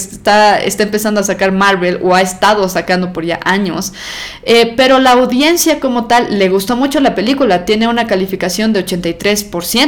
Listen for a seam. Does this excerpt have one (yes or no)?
no